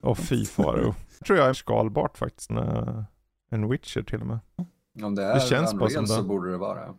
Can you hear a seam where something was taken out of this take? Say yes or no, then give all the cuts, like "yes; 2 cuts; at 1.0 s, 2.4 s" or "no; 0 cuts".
yes; 3 cuts; at 1.2 s, 1.5 s, 2.5 s